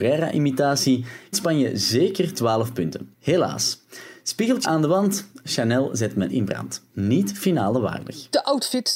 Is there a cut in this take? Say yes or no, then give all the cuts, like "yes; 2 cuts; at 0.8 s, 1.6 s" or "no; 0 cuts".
yes; 5 cuts; at 1.3 s, 3.1 s, 4.6 s, 6.3 s, 6.9 s